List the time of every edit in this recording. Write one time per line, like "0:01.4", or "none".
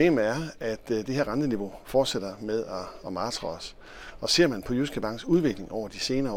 none